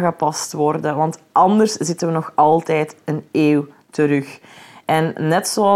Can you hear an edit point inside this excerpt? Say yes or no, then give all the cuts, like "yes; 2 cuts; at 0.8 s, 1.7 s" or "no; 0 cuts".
no; 0 cuts